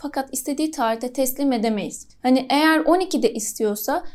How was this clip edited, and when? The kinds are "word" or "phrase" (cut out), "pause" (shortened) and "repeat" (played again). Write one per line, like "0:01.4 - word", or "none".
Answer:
none